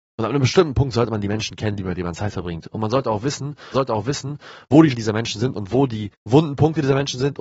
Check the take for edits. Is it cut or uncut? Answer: cut